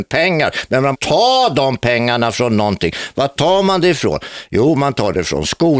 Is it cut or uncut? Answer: cut